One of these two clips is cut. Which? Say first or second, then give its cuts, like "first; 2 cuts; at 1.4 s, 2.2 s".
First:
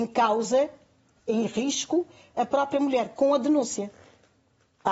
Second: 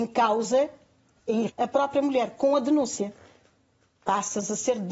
second; 1 cut; at 1.5 s